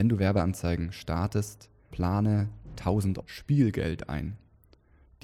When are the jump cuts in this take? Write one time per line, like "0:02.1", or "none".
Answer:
0:01.9
0:03.2